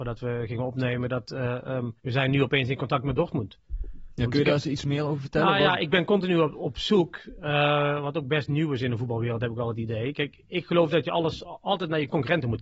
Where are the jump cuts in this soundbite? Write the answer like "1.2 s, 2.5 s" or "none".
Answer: 2.0 s